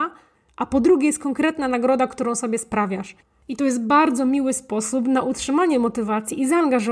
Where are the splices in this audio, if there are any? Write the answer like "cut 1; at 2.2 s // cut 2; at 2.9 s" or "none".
none